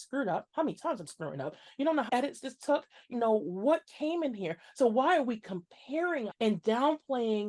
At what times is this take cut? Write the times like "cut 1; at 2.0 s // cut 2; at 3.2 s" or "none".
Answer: cut 1; at 1.1 s // cut 2; at 2.1 s // cut 3; at 3.1 s // cut 4; at 6.3 s